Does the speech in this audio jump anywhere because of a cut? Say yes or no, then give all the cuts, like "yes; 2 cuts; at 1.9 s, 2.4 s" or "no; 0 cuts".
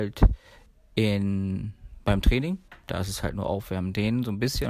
no; 0 cuts